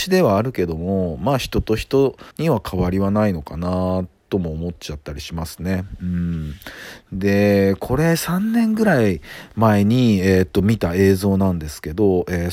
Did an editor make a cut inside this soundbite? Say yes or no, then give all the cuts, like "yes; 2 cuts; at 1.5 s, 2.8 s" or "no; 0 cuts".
yes; 1 cut; at 2.3 s